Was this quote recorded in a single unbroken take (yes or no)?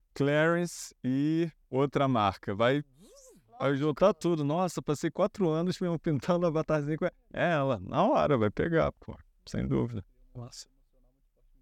yes